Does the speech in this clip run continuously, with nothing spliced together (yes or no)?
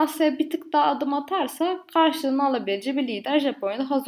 yes